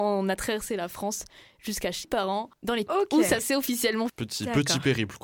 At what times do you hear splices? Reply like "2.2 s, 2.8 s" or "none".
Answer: 2.0 s, 2.9 s, 4.1 s